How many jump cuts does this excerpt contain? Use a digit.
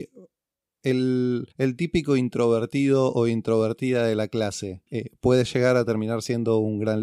2